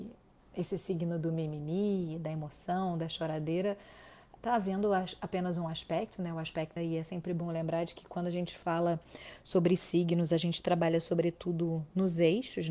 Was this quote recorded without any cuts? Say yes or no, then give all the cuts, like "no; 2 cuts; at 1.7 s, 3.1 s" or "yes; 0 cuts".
no; 2 cuts; at 4.4 s, 6.8 s